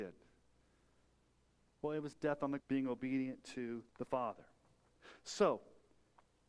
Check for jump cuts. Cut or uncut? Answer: cut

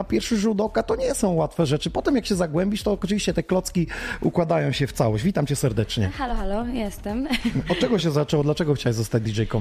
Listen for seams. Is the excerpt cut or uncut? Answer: uncut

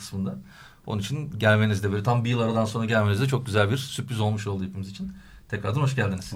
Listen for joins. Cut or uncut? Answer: uncut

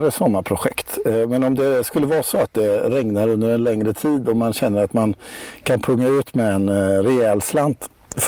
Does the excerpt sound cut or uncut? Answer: uncut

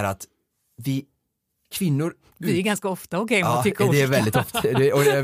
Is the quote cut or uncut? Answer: uncut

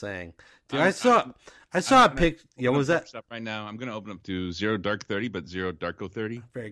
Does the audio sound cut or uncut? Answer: cut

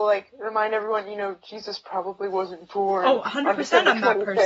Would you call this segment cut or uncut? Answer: uncut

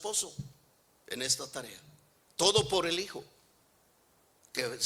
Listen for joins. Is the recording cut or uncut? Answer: uncut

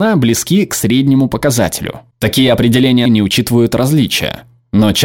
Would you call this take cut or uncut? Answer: cut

